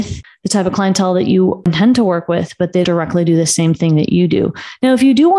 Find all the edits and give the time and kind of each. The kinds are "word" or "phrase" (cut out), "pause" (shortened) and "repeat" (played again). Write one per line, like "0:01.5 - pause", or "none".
0:02.8 - word